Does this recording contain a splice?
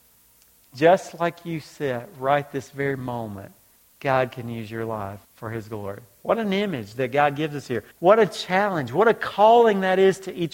yes; 3 cuts; at 3.8 s, 5.2 s, 7.9 s

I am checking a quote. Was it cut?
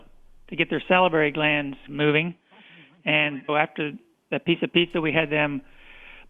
yes; 2 cuts; at 1.9 s, 3.5 s

